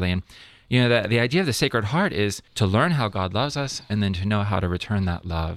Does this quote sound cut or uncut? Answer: cut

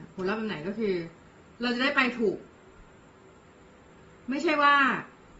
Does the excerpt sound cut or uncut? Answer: uncut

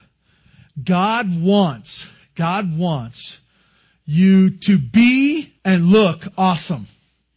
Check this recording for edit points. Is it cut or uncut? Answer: cut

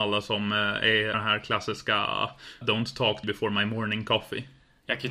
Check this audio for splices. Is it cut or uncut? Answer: cut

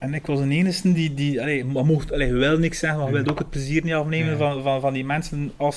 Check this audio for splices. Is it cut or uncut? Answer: uncut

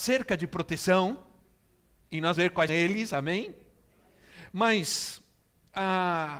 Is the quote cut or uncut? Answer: cut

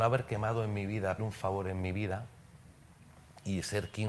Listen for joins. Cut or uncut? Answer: cut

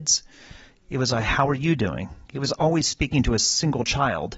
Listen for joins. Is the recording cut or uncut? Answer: uncut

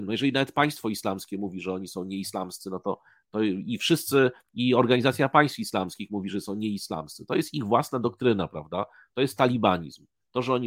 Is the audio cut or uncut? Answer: uncut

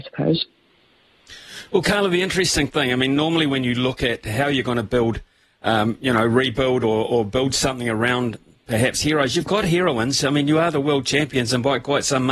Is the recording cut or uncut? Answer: uncut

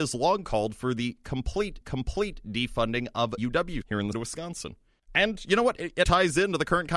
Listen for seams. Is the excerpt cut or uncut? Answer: cut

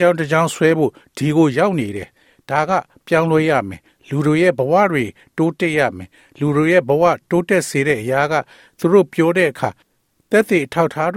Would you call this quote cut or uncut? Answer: uncut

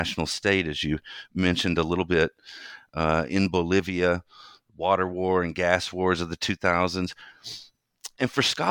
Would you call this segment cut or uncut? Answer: uncut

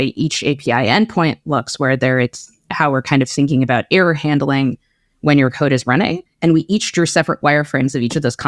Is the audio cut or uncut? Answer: uncut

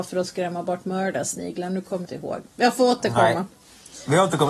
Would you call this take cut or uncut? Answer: cut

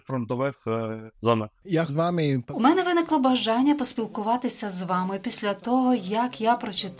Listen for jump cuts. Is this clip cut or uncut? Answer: cut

